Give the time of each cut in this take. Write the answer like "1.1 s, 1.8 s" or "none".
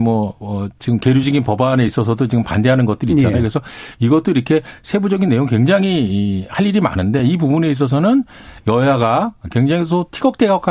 none